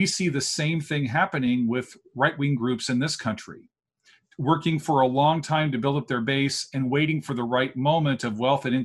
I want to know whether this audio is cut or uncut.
uncut